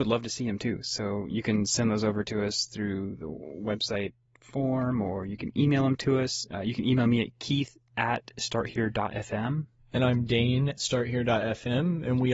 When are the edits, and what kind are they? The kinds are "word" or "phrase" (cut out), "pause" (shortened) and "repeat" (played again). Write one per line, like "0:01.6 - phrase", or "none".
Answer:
0:10.8 - word